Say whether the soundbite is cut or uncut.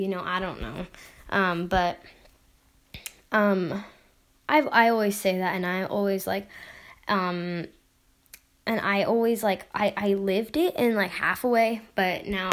uncut